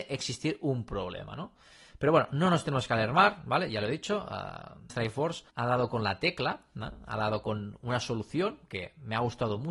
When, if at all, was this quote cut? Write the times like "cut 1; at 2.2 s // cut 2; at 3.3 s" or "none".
cut 1; at 4.9 s // cut 2; at 5.5 s